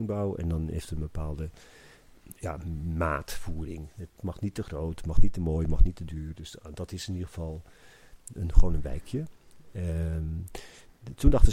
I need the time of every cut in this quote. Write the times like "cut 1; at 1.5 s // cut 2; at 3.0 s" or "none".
cut 1; at 8.3 s

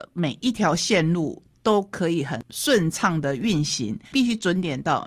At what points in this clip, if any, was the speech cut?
cut 1; at 4.0 s

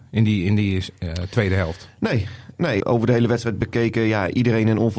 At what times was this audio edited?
cut 1; at 2.8 s

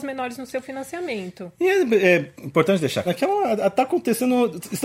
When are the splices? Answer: cut 1; at 3.1 s

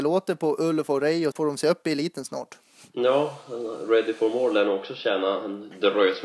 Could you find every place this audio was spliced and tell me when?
cut 1; at 1.3 s

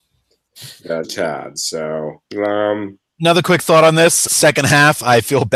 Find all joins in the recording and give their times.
cut 1; at 1.0 s // cut 2; at 2.3 s // cut 3; at 4.3 s

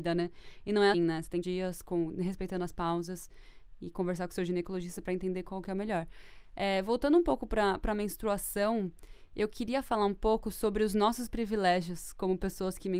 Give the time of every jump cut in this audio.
cut 1; at 0.9 s // cut 2; at 1.4 s

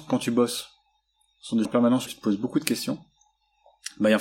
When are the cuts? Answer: cut 1; at 1.6 s // cut 2; at 2.1 s

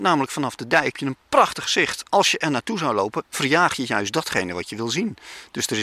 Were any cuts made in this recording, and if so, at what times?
cut 1; at 0.9 s

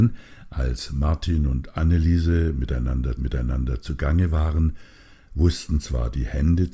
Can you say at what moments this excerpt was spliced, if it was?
cut 1; at 3.2 s

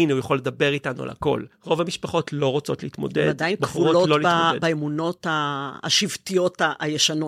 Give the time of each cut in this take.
cut 1; at 1.5 s

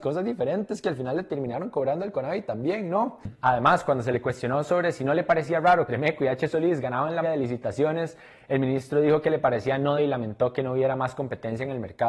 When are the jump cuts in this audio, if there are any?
cut 1; at 5.9 s // cut 2; at 7.2 s // cut 3; at 10.0 s

